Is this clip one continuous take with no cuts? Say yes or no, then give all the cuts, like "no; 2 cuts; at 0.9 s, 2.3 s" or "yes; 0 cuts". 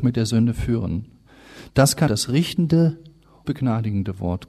no; 2 cuts; at 2.1 s, 3.4 s